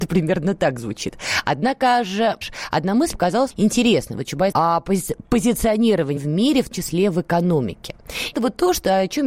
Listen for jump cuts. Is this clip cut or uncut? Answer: cut